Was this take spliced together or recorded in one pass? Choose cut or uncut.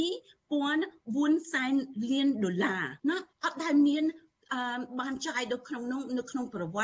cut